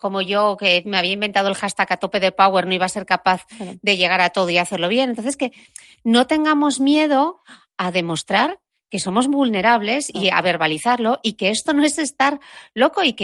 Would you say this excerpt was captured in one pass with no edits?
yes; 0 cuts

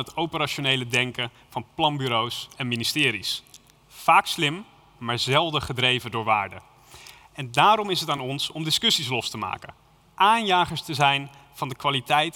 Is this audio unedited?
yes; 0 cuts

